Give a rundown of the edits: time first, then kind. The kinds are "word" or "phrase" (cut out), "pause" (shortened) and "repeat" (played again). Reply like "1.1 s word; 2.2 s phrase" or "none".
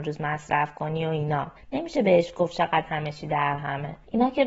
none

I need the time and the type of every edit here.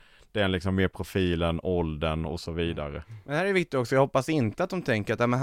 none

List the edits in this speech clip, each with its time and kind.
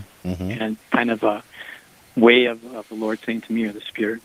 none

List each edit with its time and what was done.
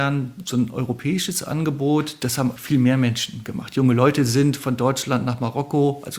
2.6 s word

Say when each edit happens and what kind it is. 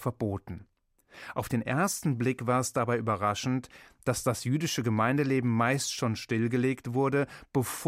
none

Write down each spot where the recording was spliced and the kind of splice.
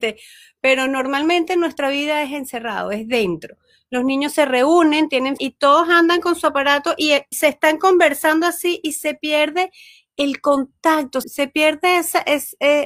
5.4 s word; 7.3 s word; 11.2 s word

